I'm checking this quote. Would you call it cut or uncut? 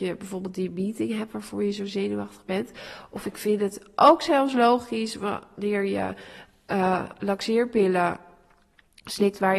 uncut